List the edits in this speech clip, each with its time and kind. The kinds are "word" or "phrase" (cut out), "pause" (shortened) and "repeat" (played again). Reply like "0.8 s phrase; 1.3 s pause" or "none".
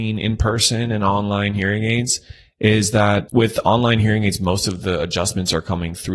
none

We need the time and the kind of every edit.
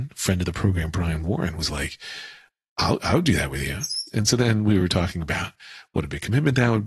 none

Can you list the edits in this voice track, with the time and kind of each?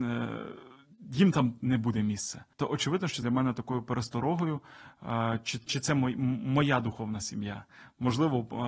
2.5 s pause; 3.2 s phrase; 5.7 s word

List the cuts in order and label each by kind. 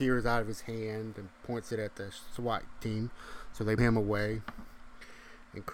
3.8 s word

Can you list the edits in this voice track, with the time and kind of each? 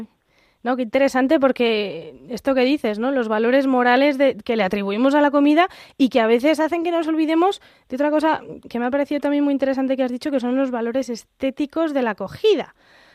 8.6 s word

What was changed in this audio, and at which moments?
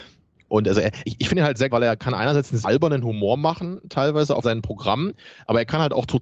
1.0 s word; 1.7 s word; 2.6 s word; 4.4 s phrase

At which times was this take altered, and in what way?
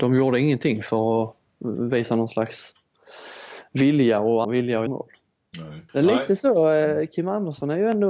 4.4 s word; 4.9 s word; 5.9 s pause

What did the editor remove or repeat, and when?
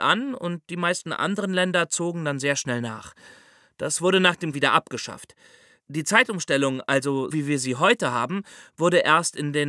4.5 s phrase; 7.3 s word

